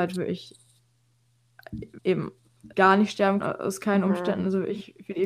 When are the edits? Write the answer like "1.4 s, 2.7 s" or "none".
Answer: 2.0 s, 2.7 s, 3.4 s